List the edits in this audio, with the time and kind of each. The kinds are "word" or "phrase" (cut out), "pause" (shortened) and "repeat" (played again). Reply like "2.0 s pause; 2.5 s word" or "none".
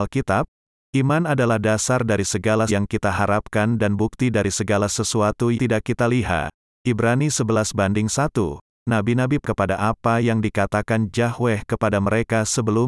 2.7 s word; 5.5 s word; 9.4 s word